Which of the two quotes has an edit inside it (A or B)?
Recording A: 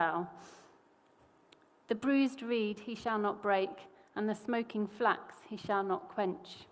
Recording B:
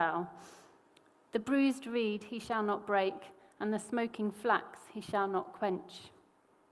B